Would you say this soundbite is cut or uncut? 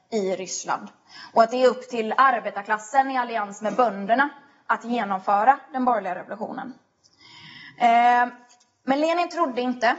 uncut